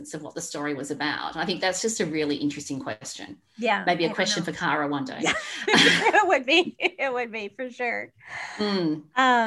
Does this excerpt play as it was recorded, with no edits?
yes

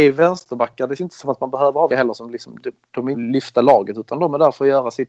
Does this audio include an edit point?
yes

